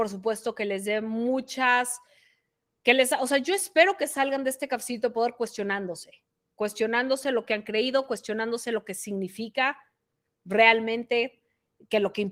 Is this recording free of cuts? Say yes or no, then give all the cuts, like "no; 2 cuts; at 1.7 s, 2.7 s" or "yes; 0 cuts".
yes; 0 cuts